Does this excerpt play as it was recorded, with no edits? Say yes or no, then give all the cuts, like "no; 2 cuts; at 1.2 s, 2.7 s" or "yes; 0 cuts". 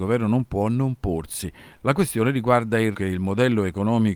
no; 1 cut; at 2.9 s